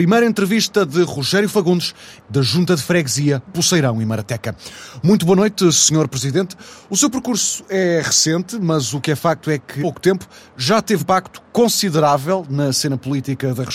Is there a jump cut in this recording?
yes; 4 cuts; at 2.2 s, 3.5 s, 9.8 s, 11.0 s

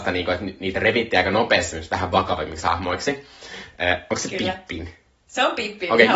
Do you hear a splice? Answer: no; 0 cuts

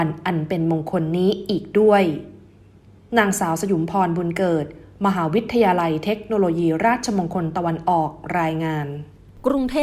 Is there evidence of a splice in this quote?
no; 0 cuts

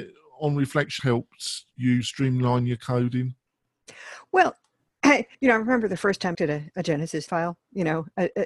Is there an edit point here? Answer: yes; 4 cuts; at 1.0 s, 5.3 s, 6.3 s, 7.3 s

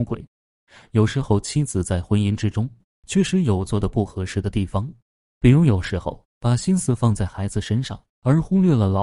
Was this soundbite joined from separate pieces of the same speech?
no; 0 cuts

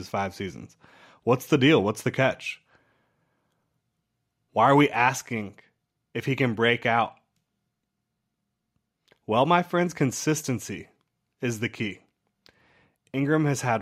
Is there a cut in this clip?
no; 0 cuts

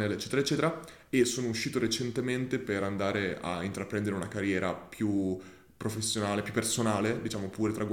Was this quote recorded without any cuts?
yes; 0 cuts

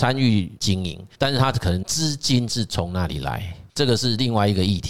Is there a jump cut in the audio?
yes; 2 cuts; at 1.1 s, 3.7 s

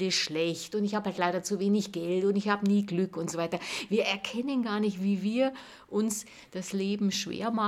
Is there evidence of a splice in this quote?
no; 0 cuts

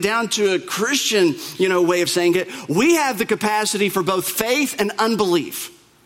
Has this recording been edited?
no; 0 cuts

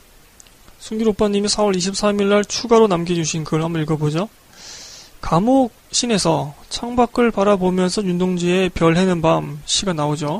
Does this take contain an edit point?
no; 0 cuts

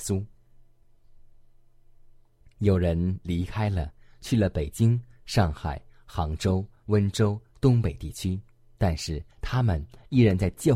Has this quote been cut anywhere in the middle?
yes; 1 cut; at 9.3 s

